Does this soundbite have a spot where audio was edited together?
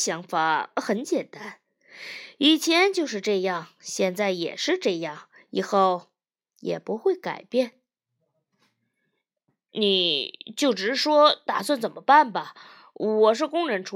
no; 0 cuts

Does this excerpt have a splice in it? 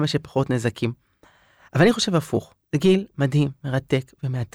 no; 0 cuts

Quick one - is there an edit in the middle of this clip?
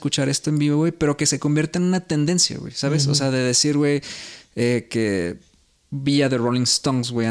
no; 0 cuts

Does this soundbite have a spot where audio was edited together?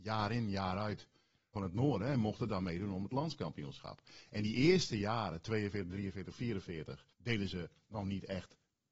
yes; 2 cuts; at 1.5 s, 7.1 s

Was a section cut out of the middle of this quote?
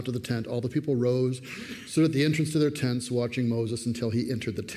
no; 0 cuts

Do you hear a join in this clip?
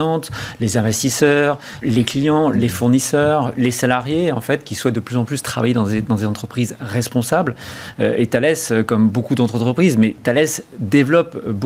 yes; 1 cut; at 1.8 s

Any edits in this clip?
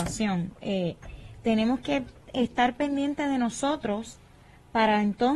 no; 0 cuts

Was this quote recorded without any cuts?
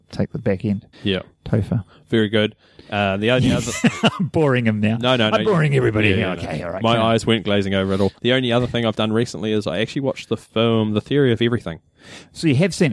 no; 2 cuts; at 0.9 s, 8.2 s

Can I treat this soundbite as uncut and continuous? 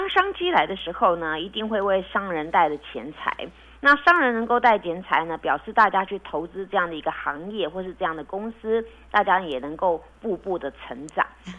yes; 0 cuts

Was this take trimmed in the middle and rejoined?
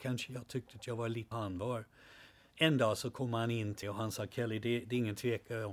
yes; 2 cuts; at 1.3 s, 3.8 s

